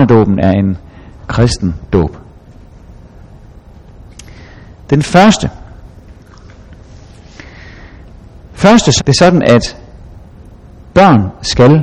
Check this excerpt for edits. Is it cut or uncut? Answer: cut